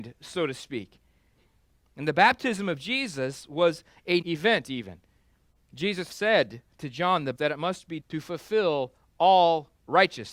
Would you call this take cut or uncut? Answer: cut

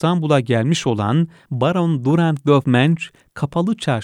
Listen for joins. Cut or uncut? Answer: cut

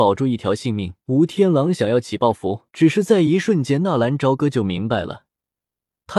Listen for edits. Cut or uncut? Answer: cut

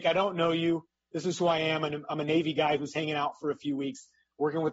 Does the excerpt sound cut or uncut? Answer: uncut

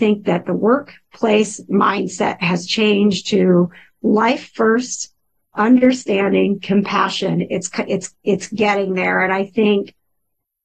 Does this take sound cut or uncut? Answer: uncut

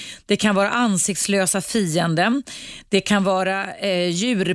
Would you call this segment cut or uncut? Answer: uncut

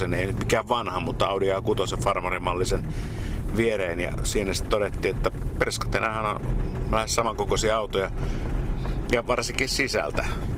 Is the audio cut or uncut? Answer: uncut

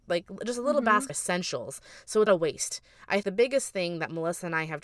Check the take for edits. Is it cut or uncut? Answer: cut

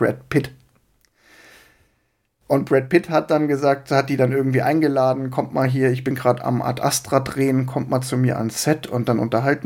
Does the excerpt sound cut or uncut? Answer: uncut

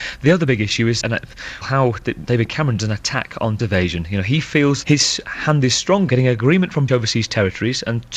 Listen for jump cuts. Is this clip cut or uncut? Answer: cut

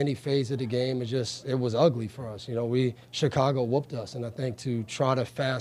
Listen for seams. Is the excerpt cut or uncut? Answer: cut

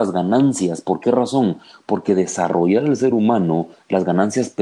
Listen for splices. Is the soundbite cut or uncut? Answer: uncut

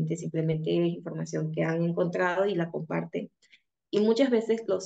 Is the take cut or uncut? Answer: uncut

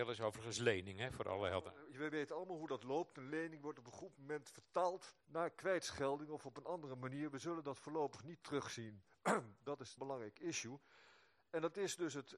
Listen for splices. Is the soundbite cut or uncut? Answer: cut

